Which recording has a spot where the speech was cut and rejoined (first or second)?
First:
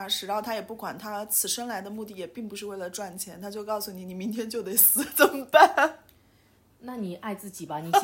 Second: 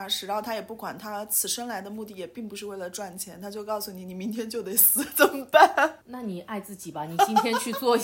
second